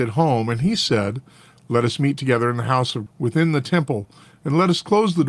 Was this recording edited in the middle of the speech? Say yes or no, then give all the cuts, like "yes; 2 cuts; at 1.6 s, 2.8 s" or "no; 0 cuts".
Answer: yes; 1 cut; at 3.1 s